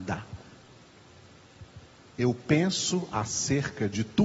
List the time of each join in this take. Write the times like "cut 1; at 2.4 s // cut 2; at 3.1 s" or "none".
cut 1; at 1.9 s